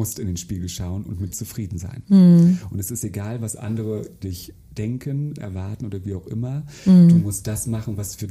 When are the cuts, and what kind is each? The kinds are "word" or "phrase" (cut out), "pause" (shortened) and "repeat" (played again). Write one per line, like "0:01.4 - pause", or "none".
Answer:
0:01.3 - word
0:04.2 - word
0:05.4 - word